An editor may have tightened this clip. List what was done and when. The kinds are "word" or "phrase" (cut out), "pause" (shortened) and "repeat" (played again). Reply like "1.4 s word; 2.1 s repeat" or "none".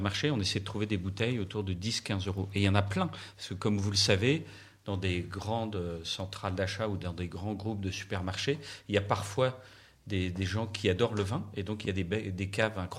none